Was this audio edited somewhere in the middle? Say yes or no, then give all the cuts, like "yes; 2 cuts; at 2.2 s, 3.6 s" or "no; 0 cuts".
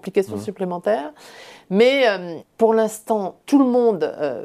yes; 2 cuts; at 2.4 s, 3.4 s